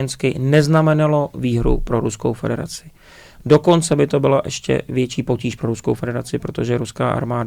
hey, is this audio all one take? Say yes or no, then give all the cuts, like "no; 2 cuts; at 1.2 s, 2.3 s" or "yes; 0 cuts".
yes; 0 cuts